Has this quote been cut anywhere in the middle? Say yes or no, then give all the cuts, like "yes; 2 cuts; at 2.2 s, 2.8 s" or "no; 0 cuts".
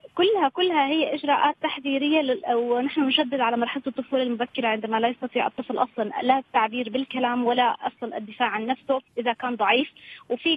yes; 1 cut; at 9.1 s